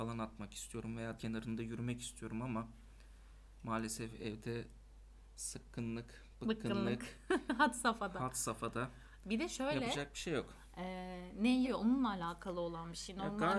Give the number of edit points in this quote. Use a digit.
2